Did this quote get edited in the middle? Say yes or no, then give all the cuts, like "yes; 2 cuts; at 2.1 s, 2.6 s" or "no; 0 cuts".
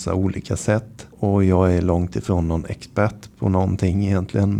yes; 1 cut; at 1.1 s